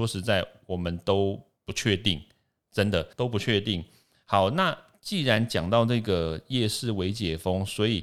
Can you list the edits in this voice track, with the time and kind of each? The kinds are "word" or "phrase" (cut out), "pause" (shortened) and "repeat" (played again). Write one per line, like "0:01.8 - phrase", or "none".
0:03.1 - pause